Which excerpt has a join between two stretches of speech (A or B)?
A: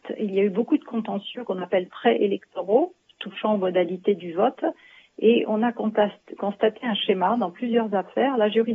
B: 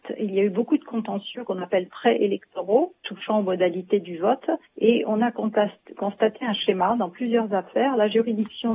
B